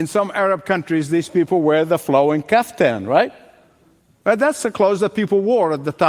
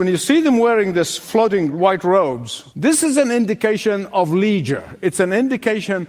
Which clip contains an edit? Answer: second; 1 cut; at 2.7 s

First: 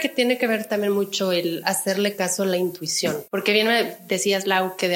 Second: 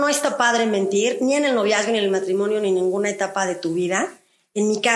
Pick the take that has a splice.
first; 1 cut; at 3.3 s

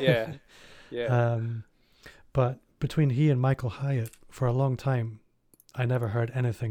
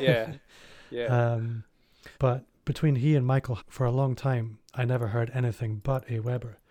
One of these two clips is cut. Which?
second; 3 cuts; at 2.1 s, 3.6 s, 4.6 s

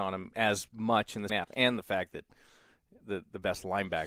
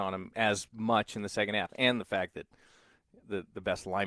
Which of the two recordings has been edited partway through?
first; 1 cut; at 1.3 s

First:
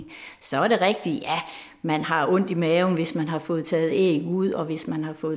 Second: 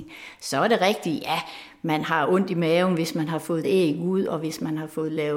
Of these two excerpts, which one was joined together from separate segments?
second; 1 cut; at 3.6 s

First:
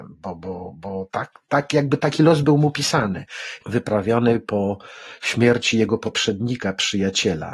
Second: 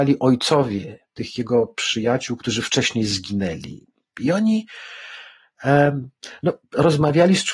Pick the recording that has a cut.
first; 2 cuts; at 1.1 s, 3.6 s

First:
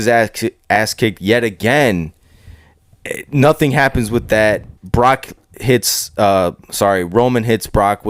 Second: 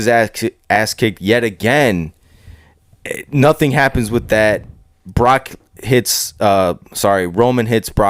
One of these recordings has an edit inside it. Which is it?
first; 1 cut; at 4.8 s

